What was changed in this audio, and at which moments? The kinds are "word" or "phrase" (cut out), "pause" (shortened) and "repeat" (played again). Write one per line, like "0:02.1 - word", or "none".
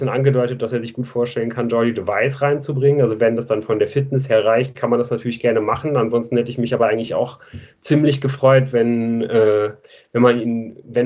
none